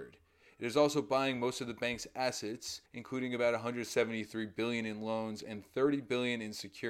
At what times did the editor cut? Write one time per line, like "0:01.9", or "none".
0:02.9